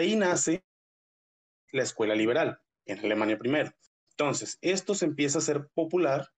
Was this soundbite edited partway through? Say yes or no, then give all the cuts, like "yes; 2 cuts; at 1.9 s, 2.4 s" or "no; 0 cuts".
no; 0 cuts